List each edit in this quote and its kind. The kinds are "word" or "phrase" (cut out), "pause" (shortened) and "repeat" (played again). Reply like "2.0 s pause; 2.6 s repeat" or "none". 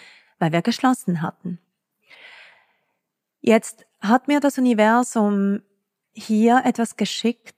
none